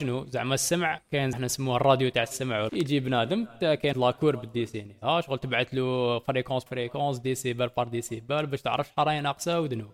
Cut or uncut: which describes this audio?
cut